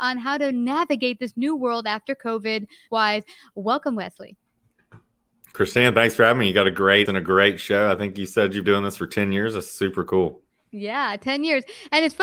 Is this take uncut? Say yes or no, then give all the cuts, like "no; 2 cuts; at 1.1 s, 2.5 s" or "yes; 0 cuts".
no; 3 cuts; at 2.9 s, 7.1 s, 8.6 s